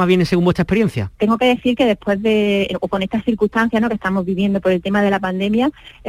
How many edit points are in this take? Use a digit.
1